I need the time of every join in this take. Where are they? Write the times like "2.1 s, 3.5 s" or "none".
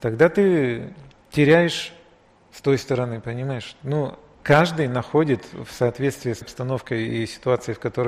6.4 s